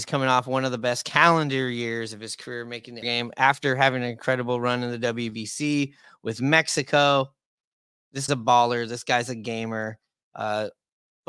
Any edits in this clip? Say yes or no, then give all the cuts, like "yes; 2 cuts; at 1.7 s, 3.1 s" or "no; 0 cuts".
yes; 2 cuts; at 3.0 s, 8.3 s